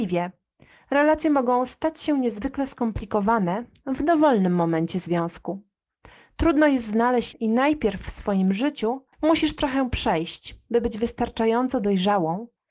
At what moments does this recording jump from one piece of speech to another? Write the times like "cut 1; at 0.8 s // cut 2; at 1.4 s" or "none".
cut 1; at 7.3 s // cut 2; at 9.1 s